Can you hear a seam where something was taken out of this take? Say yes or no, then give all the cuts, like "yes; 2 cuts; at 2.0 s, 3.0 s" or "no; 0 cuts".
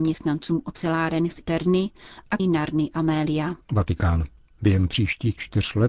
yes; 3 cuts; at 1.4 s, 2.4 s, 3.6 s